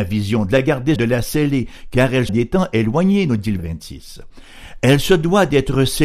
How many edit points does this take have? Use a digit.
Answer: 3